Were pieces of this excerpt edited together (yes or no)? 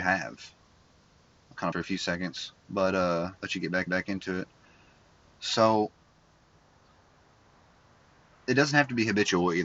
yes